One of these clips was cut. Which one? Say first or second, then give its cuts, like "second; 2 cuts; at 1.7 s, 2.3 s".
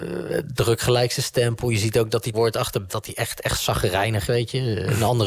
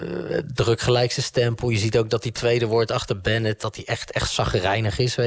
first; 3 cuts; at 2.3 s, 2.9 s, 4.3 s